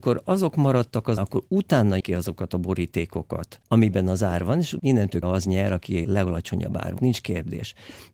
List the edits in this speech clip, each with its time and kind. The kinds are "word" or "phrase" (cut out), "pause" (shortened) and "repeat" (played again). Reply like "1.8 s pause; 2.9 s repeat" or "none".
1.2 s word; 2.0 s word; 5.2 s word; 7.0 s word